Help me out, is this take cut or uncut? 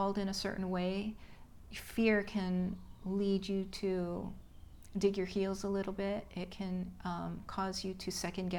uncut